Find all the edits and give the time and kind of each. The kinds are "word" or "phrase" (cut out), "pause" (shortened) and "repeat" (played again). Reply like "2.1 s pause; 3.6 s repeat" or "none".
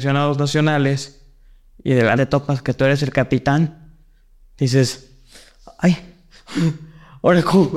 2.2 s word